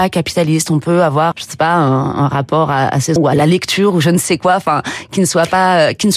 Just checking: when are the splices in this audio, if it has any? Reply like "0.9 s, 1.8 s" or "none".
1.3 s, 3.2 s